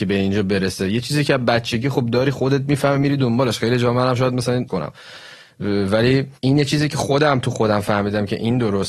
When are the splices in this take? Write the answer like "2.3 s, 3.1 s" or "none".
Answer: 4.7 s, 6.4 s